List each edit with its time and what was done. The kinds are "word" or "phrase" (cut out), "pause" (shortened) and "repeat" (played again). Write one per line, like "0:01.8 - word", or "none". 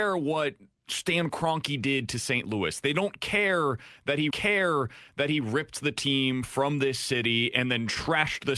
0:04.3 - repeat